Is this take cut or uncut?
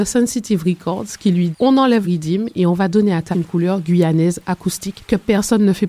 cut